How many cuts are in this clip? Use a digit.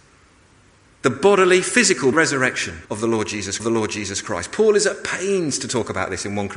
3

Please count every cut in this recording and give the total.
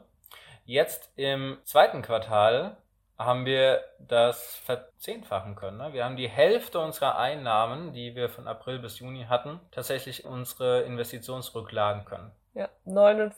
3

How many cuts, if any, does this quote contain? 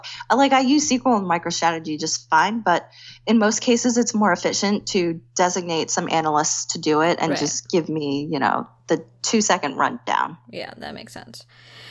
0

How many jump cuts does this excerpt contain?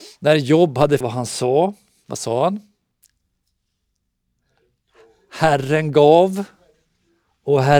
1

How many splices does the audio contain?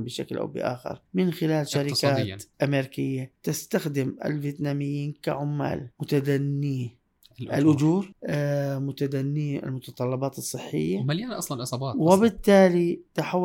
1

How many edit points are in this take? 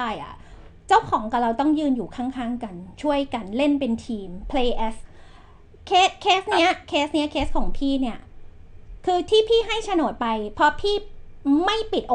1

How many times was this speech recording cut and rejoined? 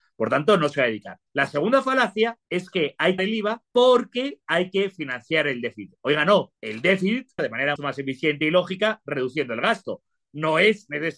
7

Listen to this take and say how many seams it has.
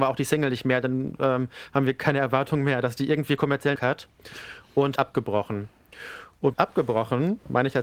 3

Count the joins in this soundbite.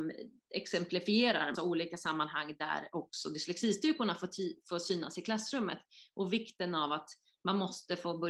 1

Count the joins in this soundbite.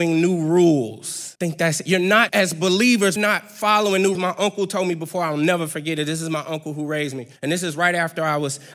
5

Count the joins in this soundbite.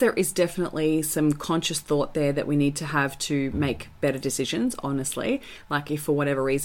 0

